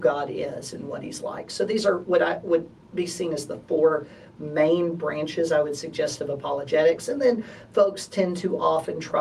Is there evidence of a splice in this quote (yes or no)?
no